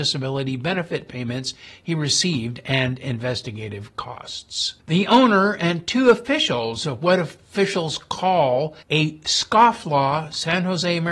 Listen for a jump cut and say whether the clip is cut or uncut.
cut